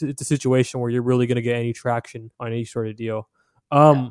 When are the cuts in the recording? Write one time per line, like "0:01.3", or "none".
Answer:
0:02.3